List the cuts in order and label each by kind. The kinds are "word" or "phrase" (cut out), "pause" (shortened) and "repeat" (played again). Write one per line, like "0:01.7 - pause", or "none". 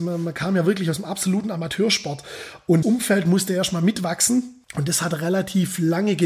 0:02.8 - word
0:04.6 - pause